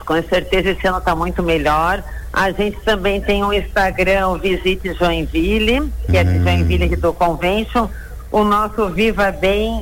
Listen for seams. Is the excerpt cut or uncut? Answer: uncut